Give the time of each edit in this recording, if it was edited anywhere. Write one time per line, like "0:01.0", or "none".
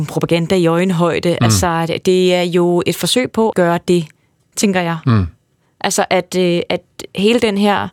0:03.5
0:04.5